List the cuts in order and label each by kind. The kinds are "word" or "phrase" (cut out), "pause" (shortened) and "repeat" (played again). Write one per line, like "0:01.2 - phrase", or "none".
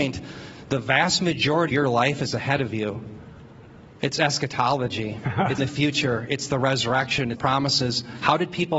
0:01.7 - word
0:05.6 - word
0:07.4 - word